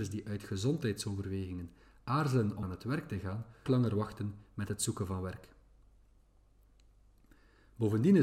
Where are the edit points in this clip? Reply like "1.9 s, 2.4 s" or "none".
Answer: 2.6 s, 3.7 s